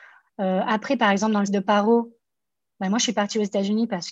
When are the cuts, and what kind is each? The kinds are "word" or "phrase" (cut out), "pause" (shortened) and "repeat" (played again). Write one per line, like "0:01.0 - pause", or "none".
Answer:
0:01.5 - word